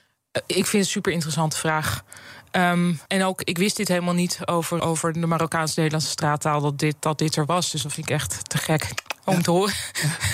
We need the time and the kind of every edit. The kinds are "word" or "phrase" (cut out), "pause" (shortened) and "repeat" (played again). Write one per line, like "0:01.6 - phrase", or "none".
0:03.1 - pause
0:04.8 - word
0:09.2 - pause